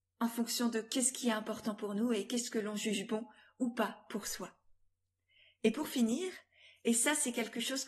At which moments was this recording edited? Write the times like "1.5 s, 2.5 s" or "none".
none